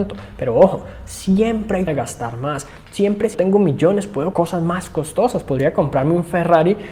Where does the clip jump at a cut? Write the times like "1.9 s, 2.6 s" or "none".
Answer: 1.9 s, 3.3 s, 4.3 s